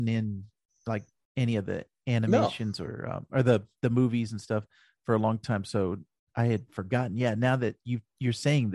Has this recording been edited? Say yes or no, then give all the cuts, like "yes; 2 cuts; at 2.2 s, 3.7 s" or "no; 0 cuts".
no; 0 cuts